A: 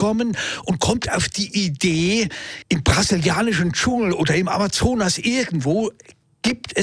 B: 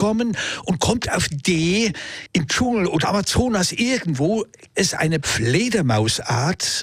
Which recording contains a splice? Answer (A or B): B